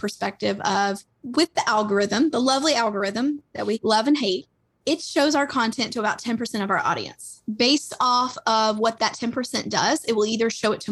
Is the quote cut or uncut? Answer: uncut